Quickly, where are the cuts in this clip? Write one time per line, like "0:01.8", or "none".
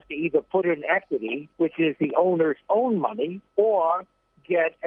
0:01.5
0:03.5